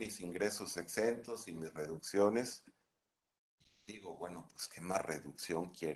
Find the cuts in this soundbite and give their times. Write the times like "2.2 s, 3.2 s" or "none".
none

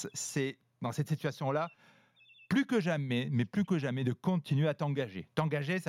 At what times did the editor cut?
none

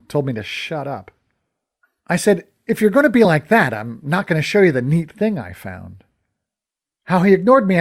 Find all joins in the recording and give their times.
none

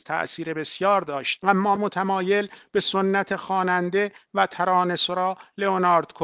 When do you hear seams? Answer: 1.4 s, 1.8 s

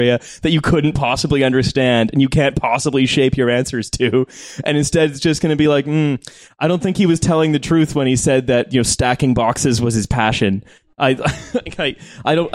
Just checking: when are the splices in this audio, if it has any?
none

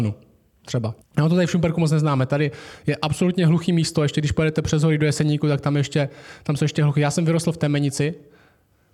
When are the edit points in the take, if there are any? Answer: 1.0 s

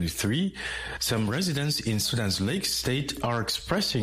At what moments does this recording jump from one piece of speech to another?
2.0 s

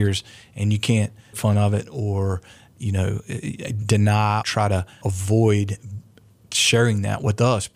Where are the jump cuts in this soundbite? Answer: 1.3 s, 4.4 s, 5.0 s

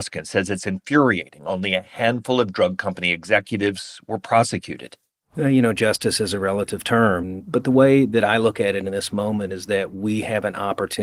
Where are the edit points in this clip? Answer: none

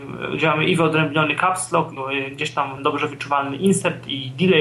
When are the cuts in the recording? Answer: 2.0 s, 2.8 s

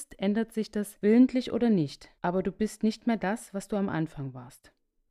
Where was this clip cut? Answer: none

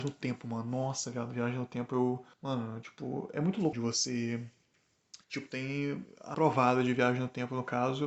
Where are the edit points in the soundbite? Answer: 2.3 s, 3.7 s, 5.2 s, 6.3 s

